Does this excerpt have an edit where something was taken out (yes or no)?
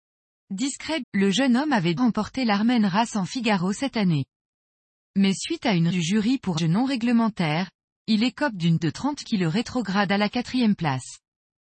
yes